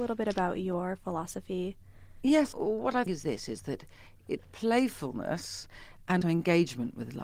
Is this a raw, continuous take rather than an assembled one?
no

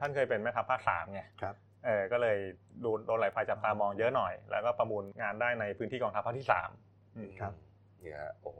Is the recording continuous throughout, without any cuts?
no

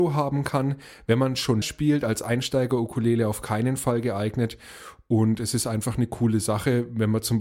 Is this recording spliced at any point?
yes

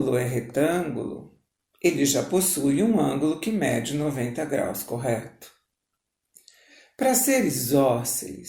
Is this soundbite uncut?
yes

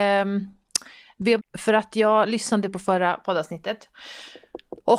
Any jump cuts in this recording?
yes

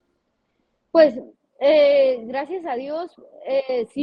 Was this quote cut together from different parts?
no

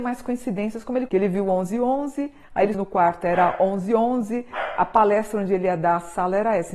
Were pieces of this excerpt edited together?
yes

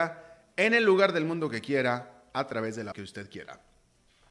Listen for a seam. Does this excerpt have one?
yes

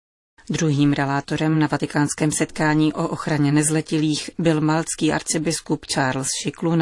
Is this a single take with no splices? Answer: yes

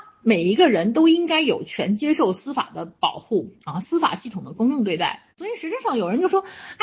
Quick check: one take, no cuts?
no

